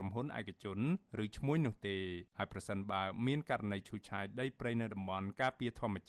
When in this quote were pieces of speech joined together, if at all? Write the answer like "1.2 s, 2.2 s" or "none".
2.3 s

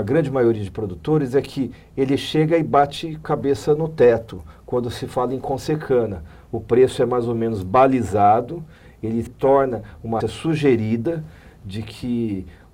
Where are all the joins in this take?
3.2 s, 9.3 s, 10.2 s

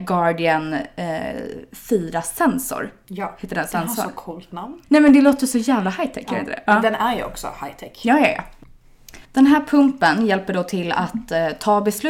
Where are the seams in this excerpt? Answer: 4.8 s, 9.2 s

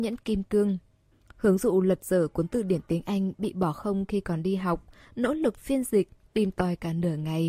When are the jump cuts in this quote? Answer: 1.1 s

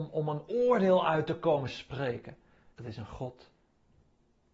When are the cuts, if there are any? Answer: 2.7 s

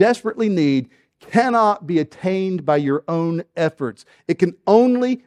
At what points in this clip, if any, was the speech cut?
none

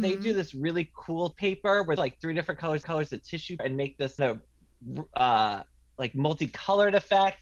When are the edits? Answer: 1.3 s, 2.0 s, 2.8 s, 3.6 s, 4.2 s

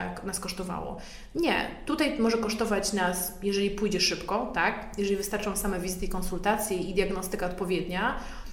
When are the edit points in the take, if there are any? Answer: none

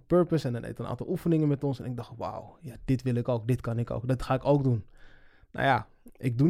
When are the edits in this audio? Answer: none

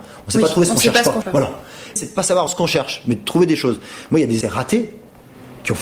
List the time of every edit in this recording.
1.2 s, 2.0 s, 2.5 s, 4.4 s

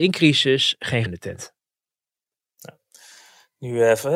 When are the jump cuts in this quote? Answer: 1.1 s

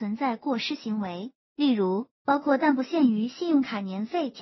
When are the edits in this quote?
2.2 s

